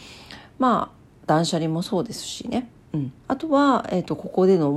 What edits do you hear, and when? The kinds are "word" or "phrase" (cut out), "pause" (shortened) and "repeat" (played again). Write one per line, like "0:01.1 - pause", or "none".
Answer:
0:03.2 - pause